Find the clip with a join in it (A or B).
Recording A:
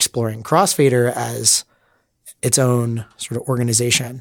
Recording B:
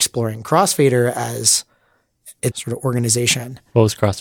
B